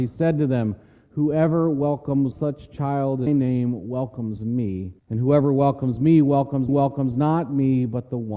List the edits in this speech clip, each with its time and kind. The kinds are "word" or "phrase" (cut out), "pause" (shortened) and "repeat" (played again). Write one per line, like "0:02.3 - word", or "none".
0:02.3 - word
0:03.3 - word
0:05.0 - pause
0:06.7 - repeat